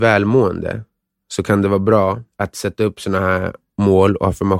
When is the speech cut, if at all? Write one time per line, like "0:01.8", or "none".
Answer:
0:02.3